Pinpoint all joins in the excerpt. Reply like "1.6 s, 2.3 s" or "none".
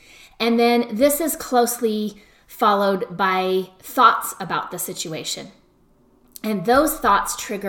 none